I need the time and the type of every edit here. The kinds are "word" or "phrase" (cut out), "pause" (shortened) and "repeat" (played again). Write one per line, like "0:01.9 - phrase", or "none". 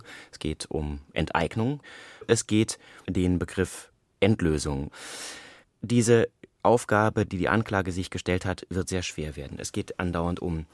0:02.3 - word
0:03.0 - word